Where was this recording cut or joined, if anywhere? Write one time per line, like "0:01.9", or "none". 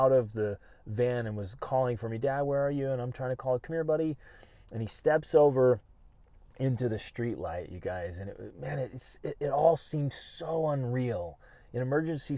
none